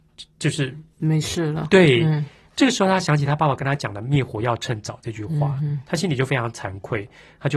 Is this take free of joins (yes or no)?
yes